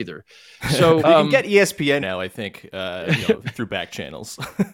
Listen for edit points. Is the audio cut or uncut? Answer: cut